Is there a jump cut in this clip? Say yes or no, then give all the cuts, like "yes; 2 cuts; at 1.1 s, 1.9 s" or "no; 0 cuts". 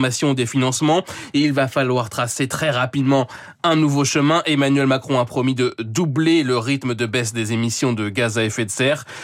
no; 0 cuts